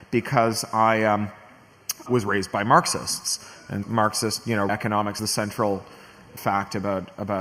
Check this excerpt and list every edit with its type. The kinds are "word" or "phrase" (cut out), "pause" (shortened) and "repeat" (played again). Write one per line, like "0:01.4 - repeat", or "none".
0:02.1 - word
0:03.8 - word
0:04.7 - word
0:05.2 - word
0:06.4 - word